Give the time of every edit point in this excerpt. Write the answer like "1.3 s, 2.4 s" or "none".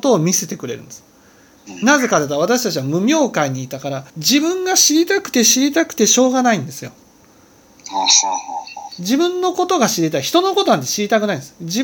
4.1 s